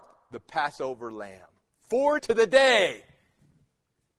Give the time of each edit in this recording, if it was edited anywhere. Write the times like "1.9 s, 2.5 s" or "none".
2.2 s

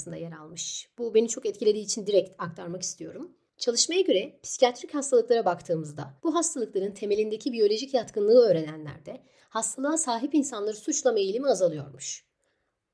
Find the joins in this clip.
3.5 s, 6.2 s

